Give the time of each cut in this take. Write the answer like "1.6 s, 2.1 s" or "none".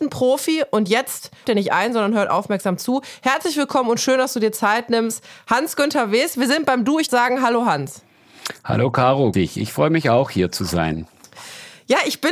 1.4 s, 7.1 s, 9.3 s